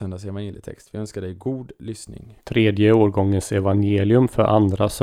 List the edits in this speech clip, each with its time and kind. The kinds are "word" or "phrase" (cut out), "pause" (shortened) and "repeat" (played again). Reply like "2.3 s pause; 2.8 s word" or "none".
none